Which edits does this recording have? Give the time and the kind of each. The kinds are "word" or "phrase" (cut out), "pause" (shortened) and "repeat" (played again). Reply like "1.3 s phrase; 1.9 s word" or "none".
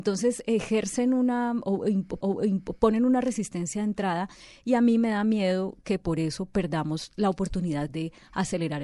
2.2 s repeat; 7.9 s phrase